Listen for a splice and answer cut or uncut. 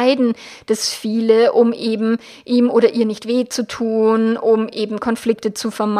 uncut